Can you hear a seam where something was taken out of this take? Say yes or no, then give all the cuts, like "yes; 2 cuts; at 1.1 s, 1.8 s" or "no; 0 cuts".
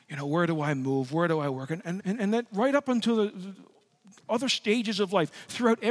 yes; 1 cut; at 2.0 s